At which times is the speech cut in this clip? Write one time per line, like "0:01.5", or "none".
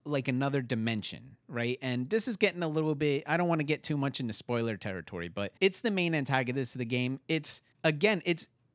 0:05.6
0:07.7